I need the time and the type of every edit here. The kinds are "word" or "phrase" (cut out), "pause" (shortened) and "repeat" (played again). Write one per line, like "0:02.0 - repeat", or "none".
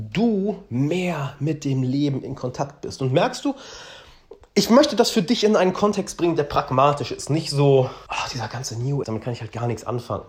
0:08.1 - pause
0:09.0 - word

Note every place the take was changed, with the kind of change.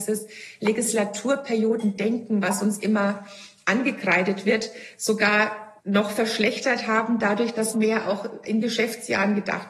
0:05.8 - pause
0:07.7 - word

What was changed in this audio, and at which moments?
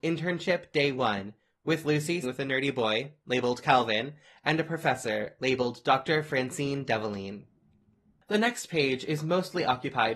0:02.2 - word

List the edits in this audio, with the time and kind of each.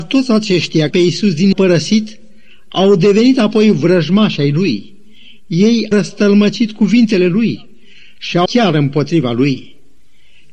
0:00.9 - phrase
0:01.5 - phrase
0:05.9 - word
0:08.5 - word

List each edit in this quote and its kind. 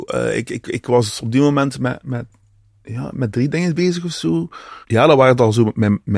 0:04.8 - pause

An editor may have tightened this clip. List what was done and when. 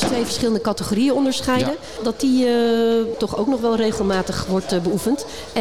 0:03.1 - word

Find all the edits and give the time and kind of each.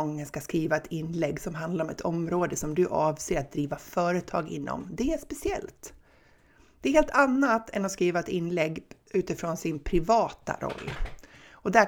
none

